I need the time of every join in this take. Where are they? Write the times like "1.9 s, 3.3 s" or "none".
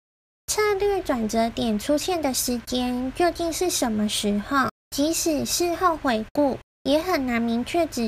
4.8 s, 6.6 s